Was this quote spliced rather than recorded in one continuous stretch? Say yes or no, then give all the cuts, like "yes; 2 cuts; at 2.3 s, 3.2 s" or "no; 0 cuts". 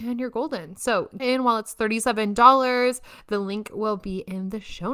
yes; 1 cut; at 1.2 s